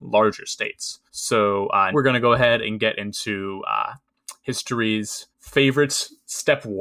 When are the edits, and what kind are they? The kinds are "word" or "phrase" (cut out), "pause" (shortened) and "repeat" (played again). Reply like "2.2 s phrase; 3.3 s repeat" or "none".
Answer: 1.1 s pause; 1.9 s word; 5.3 s pause